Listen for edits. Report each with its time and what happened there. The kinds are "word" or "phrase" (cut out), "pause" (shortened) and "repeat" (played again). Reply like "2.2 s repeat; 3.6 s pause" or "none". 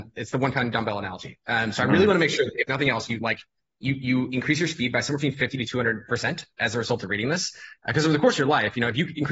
none